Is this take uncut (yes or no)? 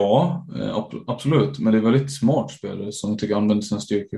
yes